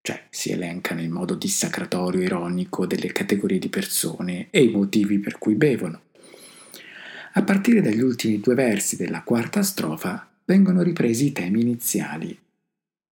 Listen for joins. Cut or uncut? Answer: uncut